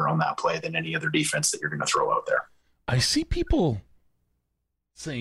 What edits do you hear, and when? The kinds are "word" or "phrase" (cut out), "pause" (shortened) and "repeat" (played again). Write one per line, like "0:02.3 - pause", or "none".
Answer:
none